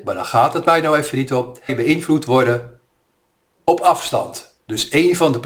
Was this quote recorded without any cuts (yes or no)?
no